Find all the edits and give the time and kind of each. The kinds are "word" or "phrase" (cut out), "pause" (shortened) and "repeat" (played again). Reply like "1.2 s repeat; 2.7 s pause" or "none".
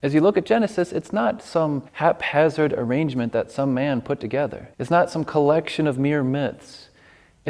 1.9 s pause; 4.7 s pause